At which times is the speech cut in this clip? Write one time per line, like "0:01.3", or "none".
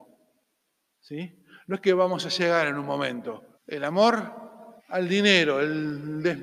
0:03.5
0:04.8